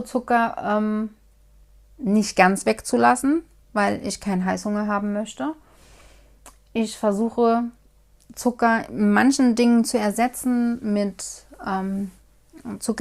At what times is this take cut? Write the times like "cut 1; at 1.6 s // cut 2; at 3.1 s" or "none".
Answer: none